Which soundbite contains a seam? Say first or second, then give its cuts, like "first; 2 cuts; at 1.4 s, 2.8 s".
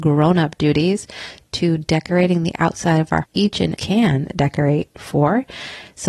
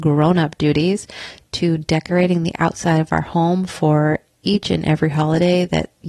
first; 2 cuts; at 3.2 s, 3.7 s